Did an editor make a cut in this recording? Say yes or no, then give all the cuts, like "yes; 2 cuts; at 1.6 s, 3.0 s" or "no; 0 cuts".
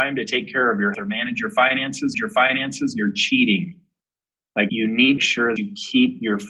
yes; 5 cuts; at 0.9 s, 2.1 s, 4.7 s, 5.2 s, 5.6 s